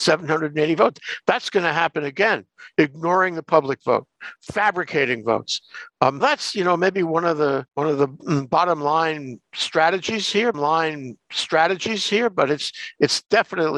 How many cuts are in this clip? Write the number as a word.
three